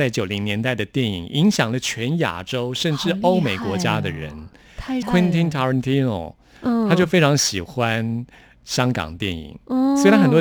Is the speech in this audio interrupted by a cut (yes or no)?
yes